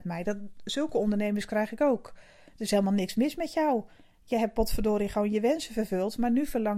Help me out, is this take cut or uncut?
uncut